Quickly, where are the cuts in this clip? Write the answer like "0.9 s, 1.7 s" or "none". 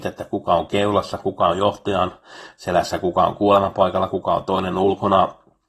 none

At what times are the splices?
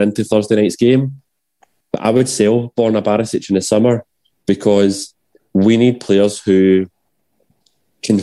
none

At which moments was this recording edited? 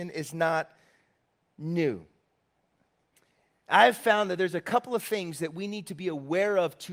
none

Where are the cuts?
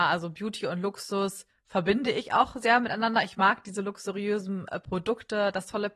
none

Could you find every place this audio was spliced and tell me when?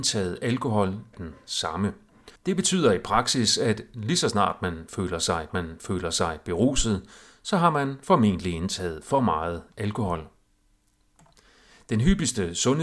1.1 s, 2.4 s, 5.5 s

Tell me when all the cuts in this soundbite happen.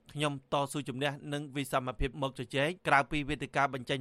2.1 s, 2.8 s

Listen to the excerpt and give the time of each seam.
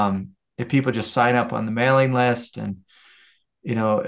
none

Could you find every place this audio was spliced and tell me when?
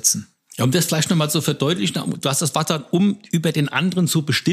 none

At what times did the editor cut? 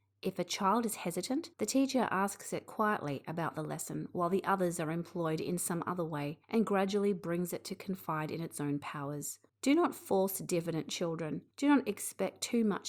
1.5 s, 6.4 s, 9.5 s, 11.5 s

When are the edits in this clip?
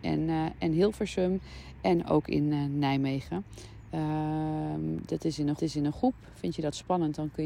5.6 s

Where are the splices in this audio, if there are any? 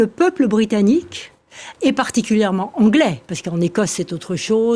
1.8 s

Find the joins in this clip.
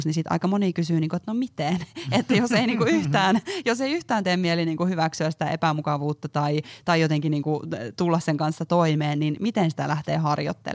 none

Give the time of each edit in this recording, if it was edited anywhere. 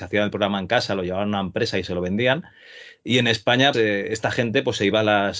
3.7 s

